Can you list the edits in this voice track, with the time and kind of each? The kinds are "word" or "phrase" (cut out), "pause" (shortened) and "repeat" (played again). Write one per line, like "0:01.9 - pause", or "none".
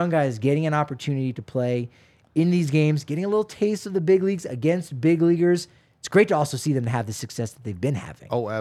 none